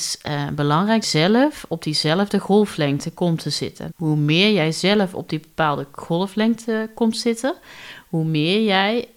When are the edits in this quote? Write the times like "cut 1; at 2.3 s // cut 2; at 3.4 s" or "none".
cut 1; at 1.0 s // cut 2; at 3.9 s